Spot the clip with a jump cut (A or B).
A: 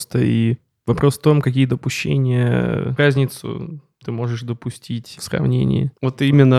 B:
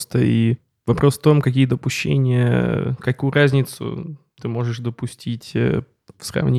A